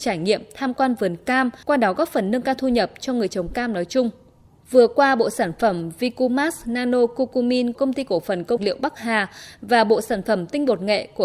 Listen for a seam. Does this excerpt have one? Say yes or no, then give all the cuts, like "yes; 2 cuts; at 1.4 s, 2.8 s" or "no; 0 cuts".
yes; 4 cuts; at 1.6 s, 4.5 s, 7.7 s, 8.6 s